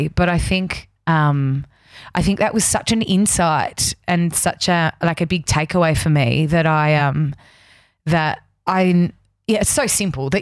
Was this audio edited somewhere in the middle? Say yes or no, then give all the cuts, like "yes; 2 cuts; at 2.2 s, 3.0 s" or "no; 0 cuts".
no; 0 cuts